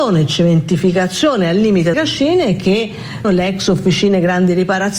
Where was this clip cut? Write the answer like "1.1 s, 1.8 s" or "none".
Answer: 1.9 s, 3.2 s